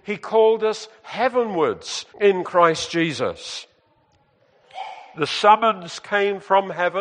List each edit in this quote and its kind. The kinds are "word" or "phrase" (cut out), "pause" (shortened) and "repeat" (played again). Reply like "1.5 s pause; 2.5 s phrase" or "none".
2.1 s pause